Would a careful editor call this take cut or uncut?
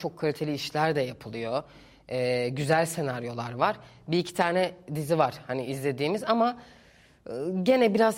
uncut